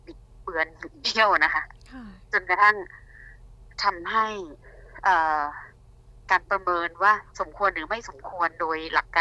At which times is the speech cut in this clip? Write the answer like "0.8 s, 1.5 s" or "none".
7.3 s